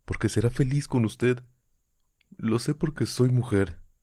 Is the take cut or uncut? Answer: uncut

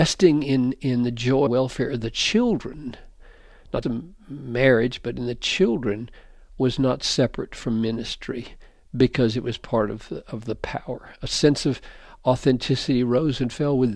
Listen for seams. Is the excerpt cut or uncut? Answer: cut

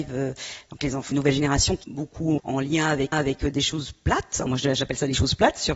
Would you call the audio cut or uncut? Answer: cut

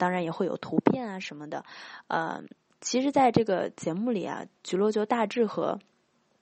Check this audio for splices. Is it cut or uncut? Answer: uncut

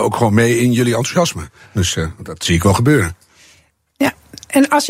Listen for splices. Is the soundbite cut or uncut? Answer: uncut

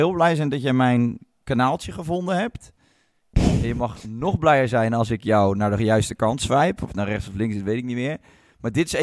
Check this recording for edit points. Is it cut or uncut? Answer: uncut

